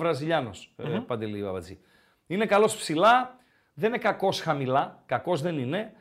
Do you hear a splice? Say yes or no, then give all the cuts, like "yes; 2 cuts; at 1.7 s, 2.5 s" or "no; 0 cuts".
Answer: no; 0 cuts